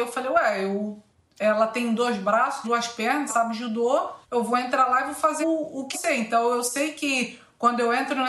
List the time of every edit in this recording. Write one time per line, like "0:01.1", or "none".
0:01.1
0:02.6
0:03.3
0:04.2
0:05.4
0:05.9